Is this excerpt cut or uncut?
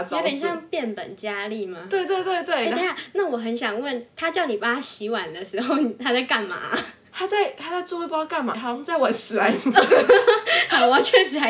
cut